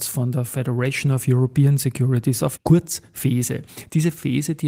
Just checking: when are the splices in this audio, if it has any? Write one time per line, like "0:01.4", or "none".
0:02.6